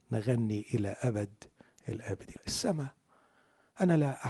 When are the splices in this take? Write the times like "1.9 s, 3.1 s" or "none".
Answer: 2.4 s